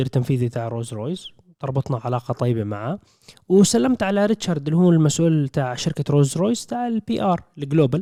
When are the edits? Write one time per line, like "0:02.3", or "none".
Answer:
none